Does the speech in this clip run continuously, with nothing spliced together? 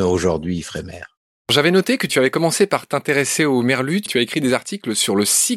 yes; 0 cuts

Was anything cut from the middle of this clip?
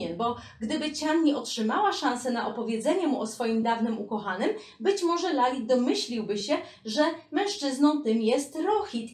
no; 0 cuts

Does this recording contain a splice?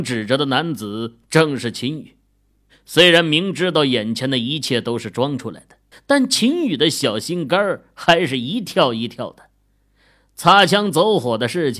yes; 1 cut; at 5.9 s

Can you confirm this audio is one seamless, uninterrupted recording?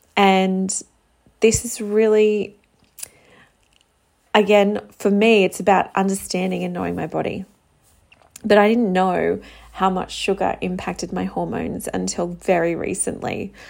yes; 0 cuts

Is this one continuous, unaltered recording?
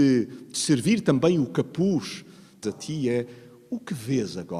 no; 1 cut; at 2.6 s

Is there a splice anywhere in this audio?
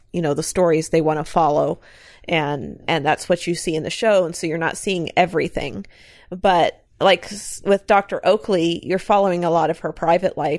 no; 0 cuts

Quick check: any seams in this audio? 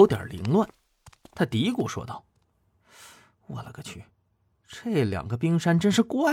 no; 0 cuts

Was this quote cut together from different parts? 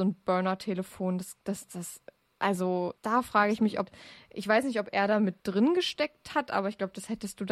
yes; 2 cuts; at 3.0 s, 5.4 s

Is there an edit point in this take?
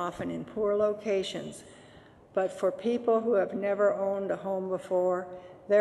no; 0 cuts

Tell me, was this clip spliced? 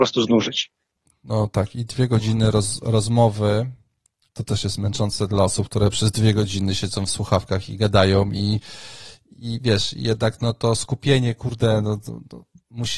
no; 0 cuts

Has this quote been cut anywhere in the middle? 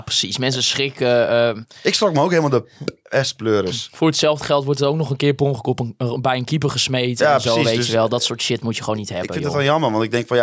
no; 0 cuts

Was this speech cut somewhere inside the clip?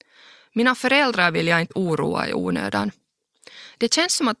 no; 0 cuts

